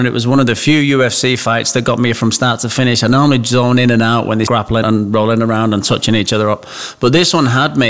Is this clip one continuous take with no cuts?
no; 2 cuts; at 4.5 s, 4.8 s

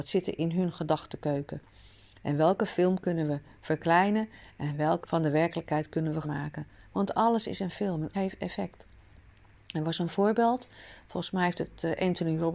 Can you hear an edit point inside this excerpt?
yes; 3 cuts; at 5.0 s, 6.2 s, 8.1 s

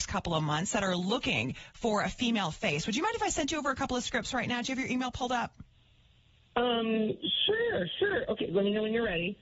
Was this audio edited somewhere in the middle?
no; 0 cuts

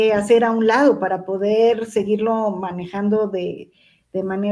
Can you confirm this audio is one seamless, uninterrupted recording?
yes; 0 cuts

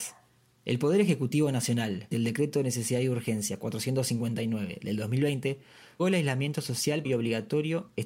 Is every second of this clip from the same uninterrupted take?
no; 3 cuts; at 2.1 s, 6.0 s, 7.0 s

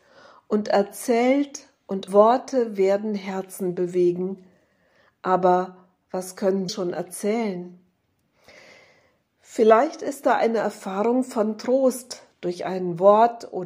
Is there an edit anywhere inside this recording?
yes; 2 cuts; at 2.1 s, 6.7 s

